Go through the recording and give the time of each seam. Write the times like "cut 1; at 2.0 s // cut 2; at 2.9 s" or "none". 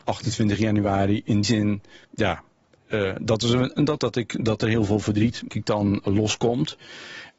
cut 1; at 1.4 s // cut 2; at 2.0 s // cut 3; at 4.0 s // cut 4; at 5.5 s